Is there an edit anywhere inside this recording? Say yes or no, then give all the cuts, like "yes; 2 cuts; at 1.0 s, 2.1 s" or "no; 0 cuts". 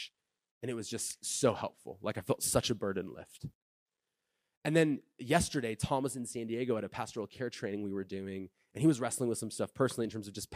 no; 0 cuts